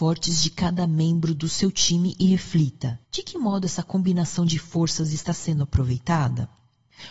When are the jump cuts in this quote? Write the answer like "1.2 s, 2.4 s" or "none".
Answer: 3.0 s

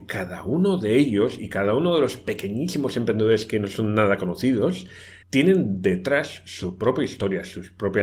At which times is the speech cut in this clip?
5.2 s

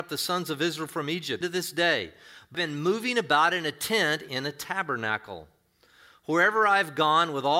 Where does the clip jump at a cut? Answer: 1.4 s, 2.5 s, 4.3 s

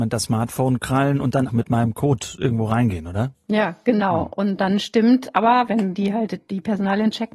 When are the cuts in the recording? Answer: 1.5 s, 5.7 s

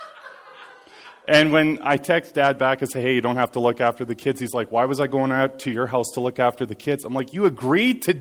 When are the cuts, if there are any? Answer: none

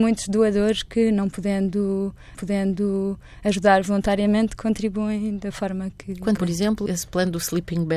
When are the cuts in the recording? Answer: 2.3 s, 6.4 s, 6.9 s

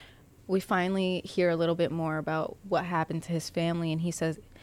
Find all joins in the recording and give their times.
none

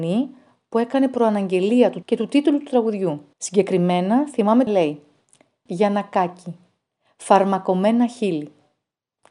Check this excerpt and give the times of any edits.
2.0 s, 3.3 s, 4.7 s, 5.7 s

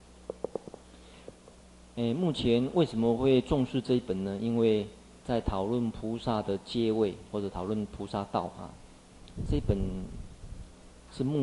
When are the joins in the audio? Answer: 5.2 s

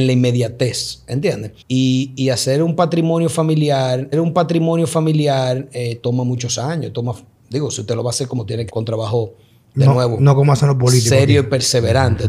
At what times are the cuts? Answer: 1.6 s, 4.1 s, 8.7 s

